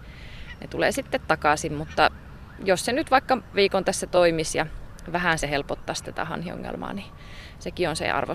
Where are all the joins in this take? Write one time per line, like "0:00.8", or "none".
0:03.5
0:05.4

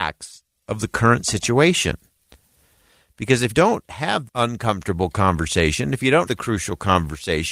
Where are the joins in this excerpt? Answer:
0:03.5
0:04.3
0:06.3

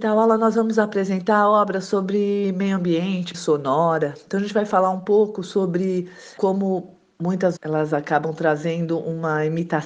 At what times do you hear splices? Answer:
0:03.3
0:06.4
0:07.6

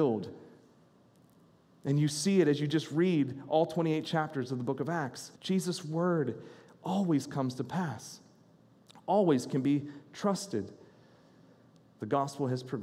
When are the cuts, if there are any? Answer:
0:05.4

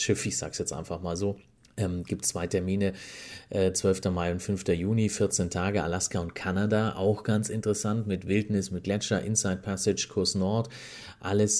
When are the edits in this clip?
0:01.6

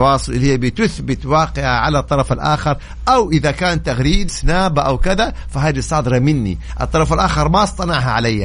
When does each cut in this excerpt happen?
0:04.3

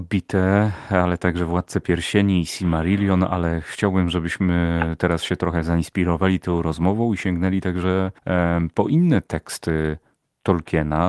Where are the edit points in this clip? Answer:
0:08.2

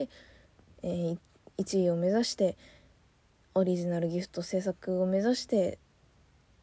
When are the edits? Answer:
none

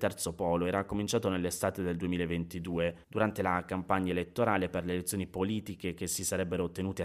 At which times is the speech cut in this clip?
0:03.0

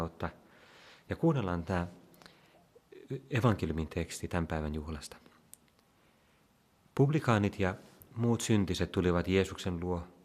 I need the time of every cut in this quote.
none

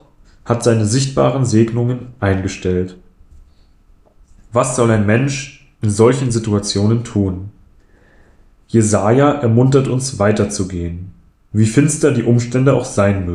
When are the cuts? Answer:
none

